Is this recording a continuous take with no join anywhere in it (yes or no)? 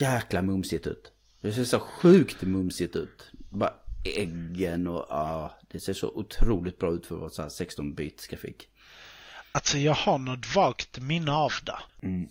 yes